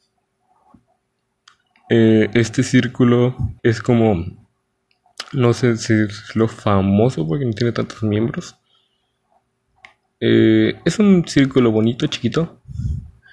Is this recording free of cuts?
no; 1 cut; at 3.6 s

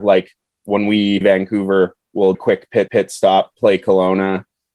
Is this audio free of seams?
no; 3 cuts; at 1.2 s, 2.3 s, 2.9 s

